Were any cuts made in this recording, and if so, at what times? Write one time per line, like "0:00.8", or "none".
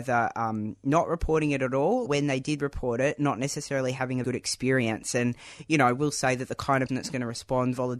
0:02.1
0:04.2
0:06.9